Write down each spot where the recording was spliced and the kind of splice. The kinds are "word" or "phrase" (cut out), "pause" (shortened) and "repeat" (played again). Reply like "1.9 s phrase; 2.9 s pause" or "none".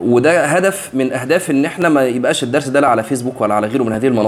none